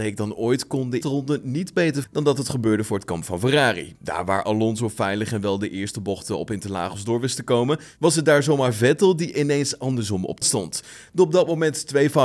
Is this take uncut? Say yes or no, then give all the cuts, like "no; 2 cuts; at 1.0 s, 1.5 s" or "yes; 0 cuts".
no; 3 cuts; at 1.0 s, 2.0 s, 10.4 s